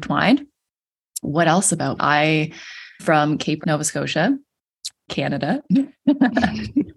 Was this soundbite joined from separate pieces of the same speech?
yes; 4 cuts; at 2.0 s, 3.0 s, 3.6 s, 5.1 s

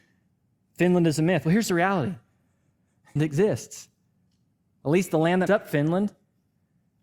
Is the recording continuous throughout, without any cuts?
no; 2 cuts; at 3.2 s, 5.5 s

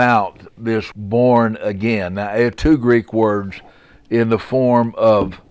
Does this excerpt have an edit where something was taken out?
yes; 2 cuts; at 0.9 s, 2.5 s

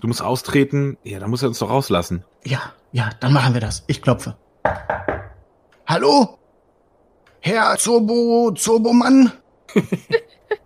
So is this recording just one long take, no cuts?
no; 1 cut; at 7.8 s

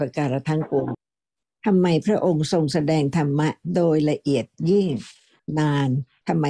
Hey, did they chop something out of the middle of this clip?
no; 0 cuts

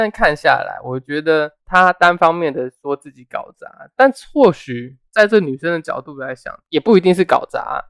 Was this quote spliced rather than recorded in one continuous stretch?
yes; 2 cuts; at 1.6 s, 5.1 s

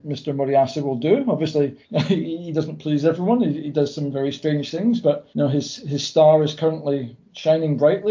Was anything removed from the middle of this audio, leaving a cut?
yes; 2 cuts; at 1.8 s, 5.3 s

